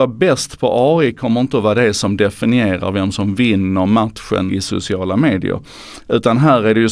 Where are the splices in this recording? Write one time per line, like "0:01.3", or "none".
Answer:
0:04.5